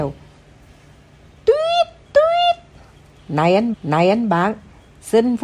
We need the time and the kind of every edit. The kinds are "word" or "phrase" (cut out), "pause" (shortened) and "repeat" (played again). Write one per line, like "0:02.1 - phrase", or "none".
0:02.0 - word
0:03.7 - repeat